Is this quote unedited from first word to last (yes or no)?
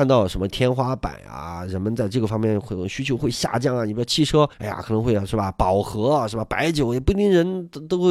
no